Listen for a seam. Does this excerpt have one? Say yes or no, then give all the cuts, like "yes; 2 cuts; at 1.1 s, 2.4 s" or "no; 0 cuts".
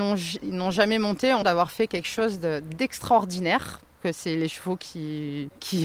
yes; 2 cuts; at 1.4 s, 4.0 s